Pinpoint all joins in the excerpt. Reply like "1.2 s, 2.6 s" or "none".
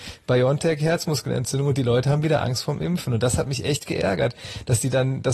none